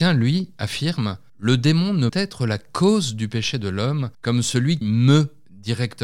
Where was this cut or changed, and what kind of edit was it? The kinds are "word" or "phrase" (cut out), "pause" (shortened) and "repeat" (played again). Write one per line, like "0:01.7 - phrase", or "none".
0:01.3 - pause
0:02.1 - word
0:04.1 - pause
0:04.8 - word